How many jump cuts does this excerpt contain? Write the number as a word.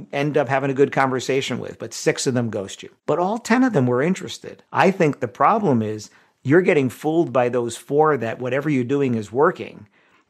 two